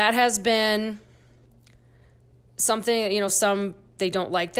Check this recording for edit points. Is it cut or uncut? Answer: uncut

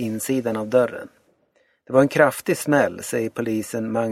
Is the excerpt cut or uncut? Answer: uncut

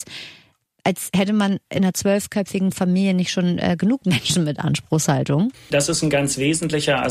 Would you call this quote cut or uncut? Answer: uncut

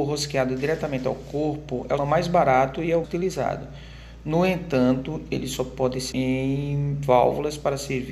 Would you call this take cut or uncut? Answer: cut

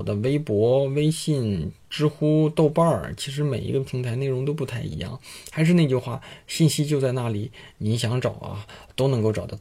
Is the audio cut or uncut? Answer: uncut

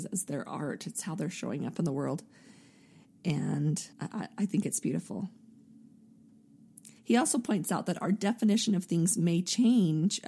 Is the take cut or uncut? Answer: cut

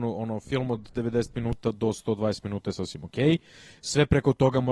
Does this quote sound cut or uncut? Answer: uncut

